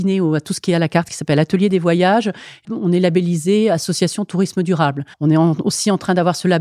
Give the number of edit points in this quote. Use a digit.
2